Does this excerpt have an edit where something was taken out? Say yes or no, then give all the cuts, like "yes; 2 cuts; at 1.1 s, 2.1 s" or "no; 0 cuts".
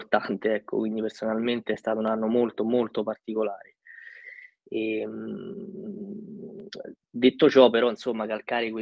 no; 0 cuts